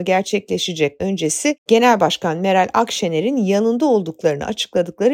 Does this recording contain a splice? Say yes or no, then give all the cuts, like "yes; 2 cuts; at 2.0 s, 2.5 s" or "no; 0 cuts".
yes; 1 cut; at 1.0 s